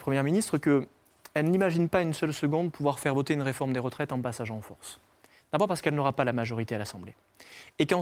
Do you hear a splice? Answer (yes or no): no